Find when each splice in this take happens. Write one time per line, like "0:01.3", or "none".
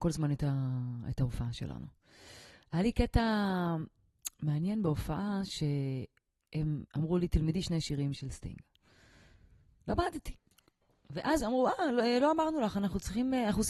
0:06.9
0:08.1
0:11.4